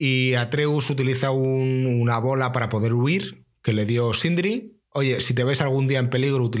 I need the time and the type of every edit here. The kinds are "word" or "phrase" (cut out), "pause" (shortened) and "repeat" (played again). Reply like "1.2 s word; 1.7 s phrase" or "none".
none